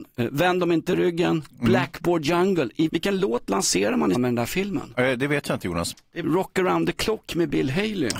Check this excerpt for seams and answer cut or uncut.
cut